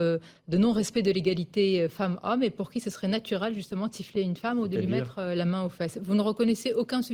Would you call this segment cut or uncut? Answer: uncut